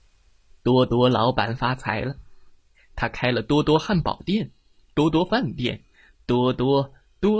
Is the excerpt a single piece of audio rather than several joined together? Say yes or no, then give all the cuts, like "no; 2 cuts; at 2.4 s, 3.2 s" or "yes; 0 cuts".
yes; 0 cuts